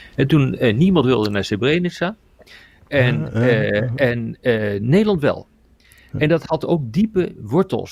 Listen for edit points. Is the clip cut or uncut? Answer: uncut